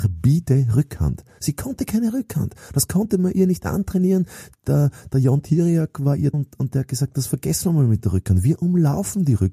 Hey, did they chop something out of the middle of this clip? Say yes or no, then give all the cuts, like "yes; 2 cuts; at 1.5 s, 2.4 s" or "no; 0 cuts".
yes; 1 cut; at 6.3 s